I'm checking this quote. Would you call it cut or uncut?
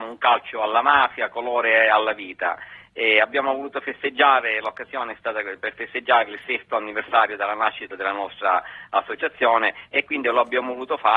uncut